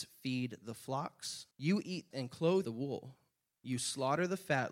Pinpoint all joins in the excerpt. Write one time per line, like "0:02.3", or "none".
0:01.5
0:02.1
0:02.6